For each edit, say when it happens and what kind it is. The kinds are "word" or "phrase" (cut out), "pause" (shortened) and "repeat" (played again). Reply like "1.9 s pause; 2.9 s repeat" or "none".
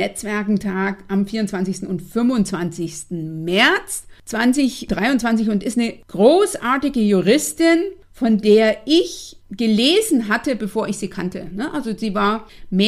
none